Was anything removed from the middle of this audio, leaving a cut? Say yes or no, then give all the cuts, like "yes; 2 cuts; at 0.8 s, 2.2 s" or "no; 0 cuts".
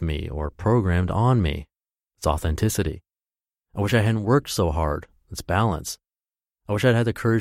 no; 0 cuts